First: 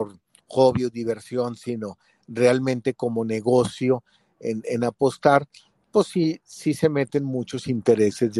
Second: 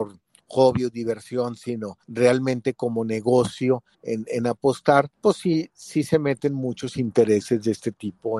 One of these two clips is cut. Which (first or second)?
second